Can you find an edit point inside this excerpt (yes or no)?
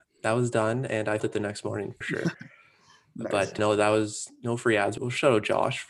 yes